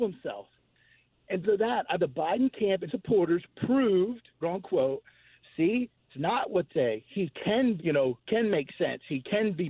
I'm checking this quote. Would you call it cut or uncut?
cut